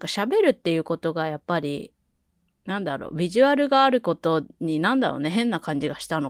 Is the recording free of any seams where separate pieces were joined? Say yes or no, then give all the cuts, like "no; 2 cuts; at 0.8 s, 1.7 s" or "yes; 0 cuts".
no; 1 cut; at 4.5 s